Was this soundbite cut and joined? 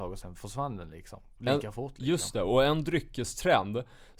no; 0 cuts

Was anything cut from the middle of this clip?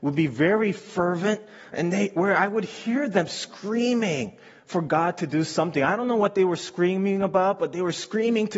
no; 0 cuts

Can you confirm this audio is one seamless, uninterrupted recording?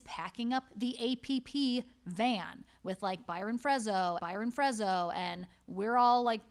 no; 1 cut; at 4.2 s

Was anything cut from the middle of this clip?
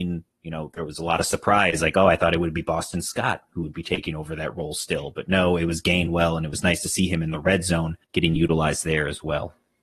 yes; 1 cut; at 8.0 s

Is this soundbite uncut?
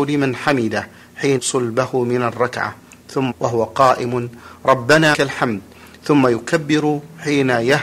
no; 3 cuts; at 1.4 s, 3.3 s, 5.1 s

